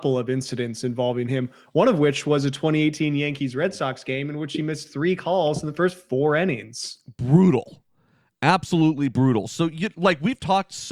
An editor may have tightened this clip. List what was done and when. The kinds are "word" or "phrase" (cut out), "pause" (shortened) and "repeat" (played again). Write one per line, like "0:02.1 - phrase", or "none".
none